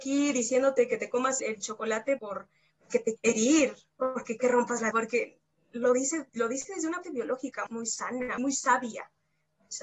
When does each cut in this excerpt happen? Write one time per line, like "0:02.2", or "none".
0:01.4
0:02.2
0:03.2
0:04.4
0:04.9
0:06.3
0:07.0
0:07.7
0:08.4